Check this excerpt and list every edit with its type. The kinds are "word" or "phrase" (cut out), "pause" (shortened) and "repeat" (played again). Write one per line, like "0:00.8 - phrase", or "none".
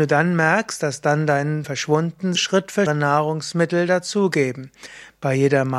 0:01.6 - word
0:02.4 - phrase
0:02.9 - phrase